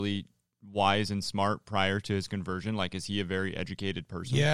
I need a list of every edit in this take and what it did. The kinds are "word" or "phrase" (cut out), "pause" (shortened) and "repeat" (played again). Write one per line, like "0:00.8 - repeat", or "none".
none